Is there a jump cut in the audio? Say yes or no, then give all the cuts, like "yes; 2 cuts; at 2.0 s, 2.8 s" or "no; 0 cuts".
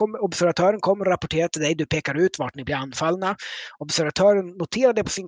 no; 0 cuts